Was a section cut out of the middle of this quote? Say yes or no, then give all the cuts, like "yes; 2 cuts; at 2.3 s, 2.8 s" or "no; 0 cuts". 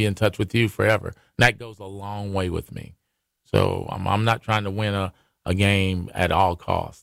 no; 0 cuts